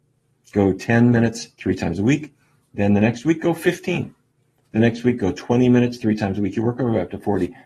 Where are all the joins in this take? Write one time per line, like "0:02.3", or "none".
none